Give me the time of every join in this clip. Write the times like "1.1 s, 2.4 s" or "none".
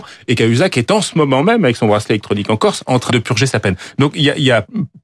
3.1 s